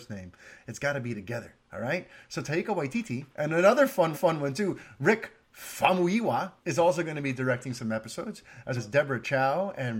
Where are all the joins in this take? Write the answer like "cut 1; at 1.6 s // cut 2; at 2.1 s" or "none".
cut 1; at 1.6 s // cut 2; at 3.3 s // cut 3; at 4.1 s // cut 4; at 6.6 s // cut 5; at 8.8 s